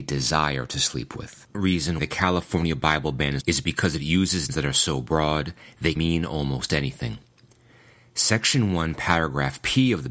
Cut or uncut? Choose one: cut